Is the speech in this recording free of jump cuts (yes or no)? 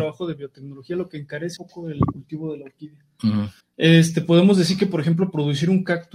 no